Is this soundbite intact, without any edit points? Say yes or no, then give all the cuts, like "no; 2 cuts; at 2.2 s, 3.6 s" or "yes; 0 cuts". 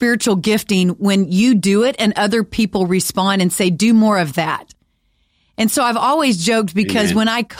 yes; 0 cuts